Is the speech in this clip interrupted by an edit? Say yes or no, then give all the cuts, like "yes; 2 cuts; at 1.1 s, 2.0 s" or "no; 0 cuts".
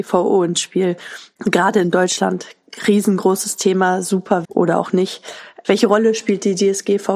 yes; 1 cut; at 4.4 s